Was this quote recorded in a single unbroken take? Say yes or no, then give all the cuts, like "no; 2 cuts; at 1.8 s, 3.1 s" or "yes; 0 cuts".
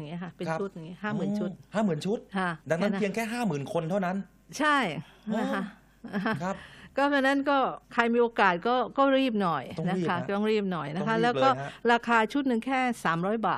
no; 2 cuts; at 2.6 s, 7.8 s